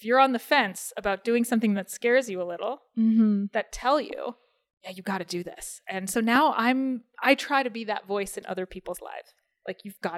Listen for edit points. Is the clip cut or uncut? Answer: uncut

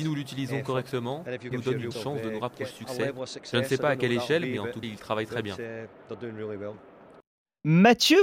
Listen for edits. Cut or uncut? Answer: cut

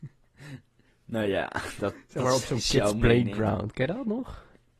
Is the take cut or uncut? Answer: uncut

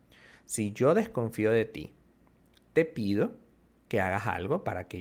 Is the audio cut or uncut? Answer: uncut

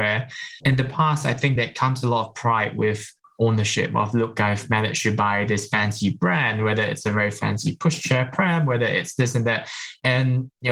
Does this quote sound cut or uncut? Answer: uncut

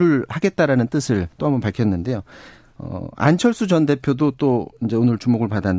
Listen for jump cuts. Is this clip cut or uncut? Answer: cut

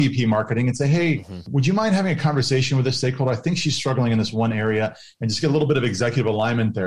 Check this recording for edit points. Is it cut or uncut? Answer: uncut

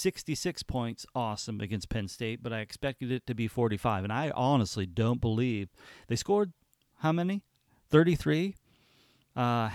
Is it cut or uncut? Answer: uncut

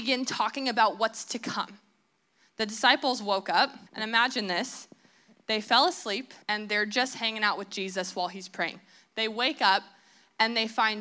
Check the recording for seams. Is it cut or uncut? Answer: cut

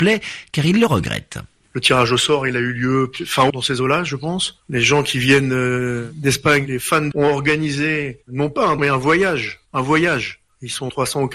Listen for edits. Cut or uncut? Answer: cut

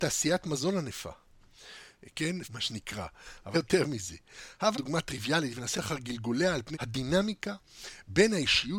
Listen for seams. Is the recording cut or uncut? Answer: cut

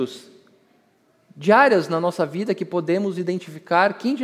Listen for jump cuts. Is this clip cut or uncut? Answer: uncut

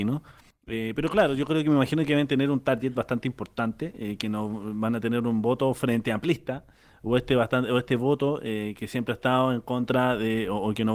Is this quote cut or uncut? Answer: uncut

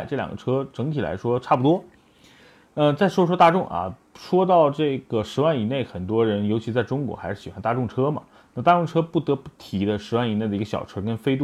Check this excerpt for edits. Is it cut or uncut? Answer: uncut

